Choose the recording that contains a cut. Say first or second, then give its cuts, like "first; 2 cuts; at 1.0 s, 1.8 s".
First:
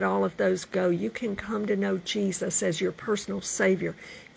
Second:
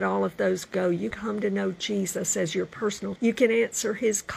second; 2 cuts; at 1.1 s, 3.2 s